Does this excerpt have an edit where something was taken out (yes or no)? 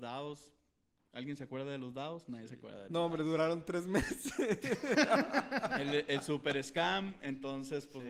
no